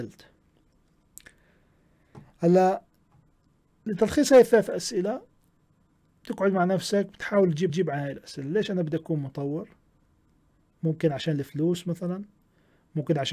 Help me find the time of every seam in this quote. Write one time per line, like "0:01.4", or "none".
0:07.7

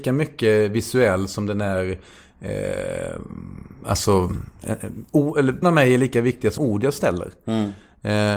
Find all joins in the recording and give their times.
0:05.6
0:06.6

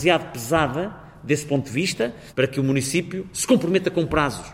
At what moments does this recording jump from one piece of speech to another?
none

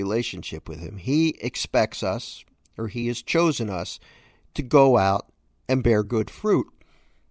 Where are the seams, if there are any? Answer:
none

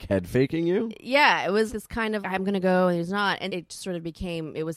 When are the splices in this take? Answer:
0:01.7
0:02.2
0:03.5

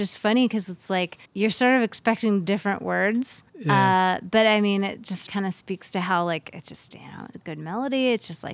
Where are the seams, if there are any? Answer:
0:01.3
0:03.5
0:05.3
0:07.3

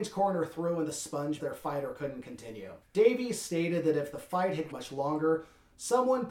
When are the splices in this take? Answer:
0:01.4
0:02.8
0:04.7

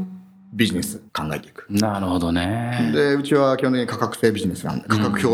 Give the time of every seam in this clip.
0:01.1

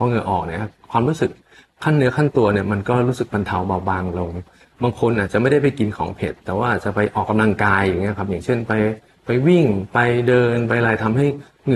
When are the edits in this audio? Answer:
none

